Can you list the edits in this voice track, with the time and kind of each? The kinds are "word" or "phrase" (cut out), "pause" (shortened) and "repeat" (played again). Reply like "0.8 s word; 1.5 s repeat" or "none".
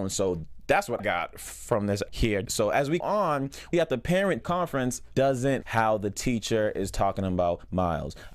1.0 s word; 2.1 s word; 2.5 s word; 3.0 s word; 3.7 s word; 4.4 s word; 5.1 s word; 5.6 s word